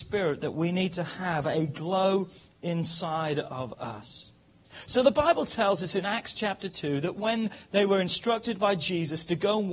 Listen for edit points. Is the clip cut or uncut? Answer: uncut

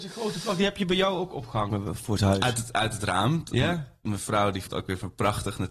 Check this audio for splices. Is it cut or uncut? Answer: cut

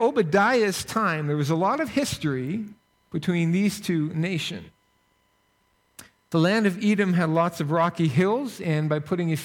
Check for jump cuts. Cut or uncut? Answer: uncut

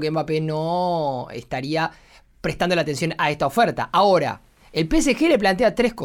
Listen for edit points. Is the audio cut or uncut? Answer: uncut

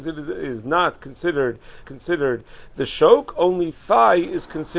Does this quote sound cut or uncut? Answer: cut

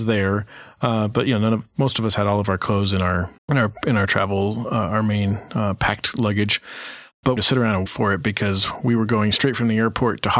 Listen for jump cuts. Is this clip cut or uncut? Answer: cut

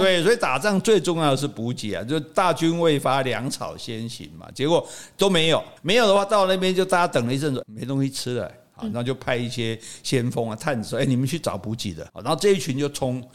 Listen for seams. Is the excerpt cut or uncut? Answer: cut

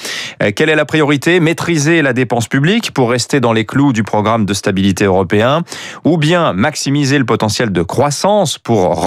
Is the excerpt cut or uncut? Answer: uncut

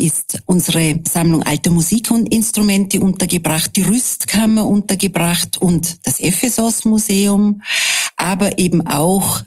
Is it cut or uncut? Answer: uncut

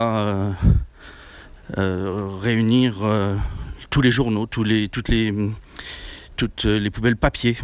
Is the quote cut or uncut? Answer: uncut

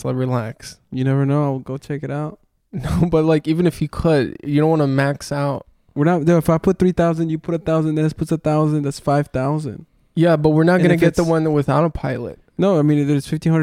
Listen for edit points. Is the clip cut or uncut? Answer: uncut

